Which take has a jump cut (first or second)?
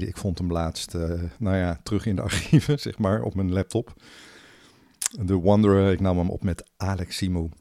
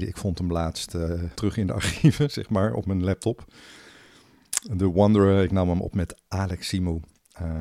second